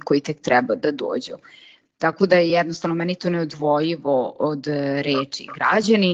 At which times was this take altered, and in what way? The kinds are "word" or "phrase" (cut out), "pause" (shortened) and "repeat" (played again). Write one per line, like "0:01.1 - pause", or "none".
none